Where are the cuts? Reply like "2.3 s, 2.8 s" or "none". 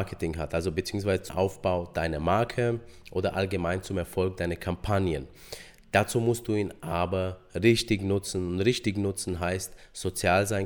1.3 s